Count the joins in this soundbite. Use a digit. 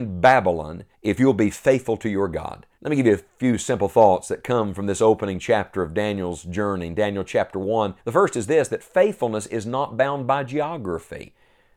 3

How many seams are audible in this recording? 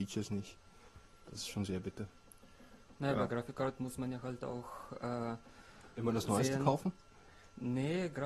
0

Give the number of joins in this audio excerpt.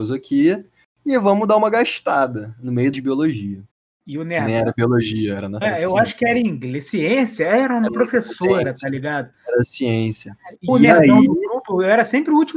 5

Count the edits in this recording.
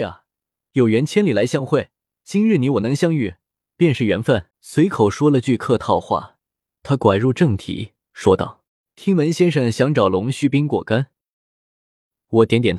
4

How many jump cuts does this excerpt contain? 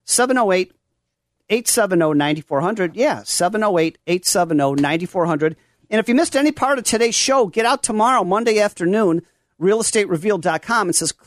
0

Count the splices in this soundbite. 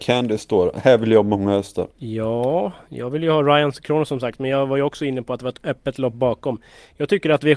1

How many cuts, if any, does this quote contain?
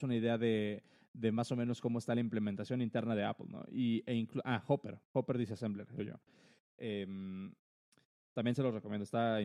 1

